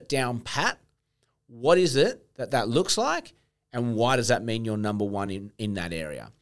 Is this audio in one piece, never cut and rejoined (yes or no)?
yes